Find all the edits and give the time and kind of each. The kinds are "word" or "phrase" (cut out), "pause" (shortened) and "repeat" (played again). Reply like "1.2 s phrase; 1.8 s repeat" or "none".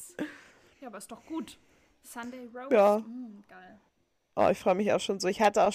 none